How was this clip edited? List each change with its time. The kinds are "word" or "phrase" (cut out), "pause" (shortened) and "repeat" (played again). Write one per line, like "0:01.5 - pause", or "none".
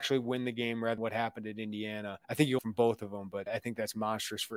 0:01.0 - word
0:02.2 - pause
0:02.6 - word
0:03.5 - word